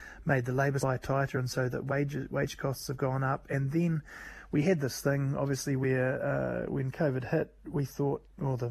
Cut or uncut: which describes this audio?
uncut